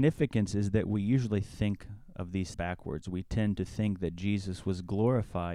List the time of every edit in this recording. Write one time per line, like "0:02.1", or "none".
0:02.5